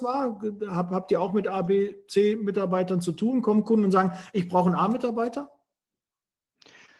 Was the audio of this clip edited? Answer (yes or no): no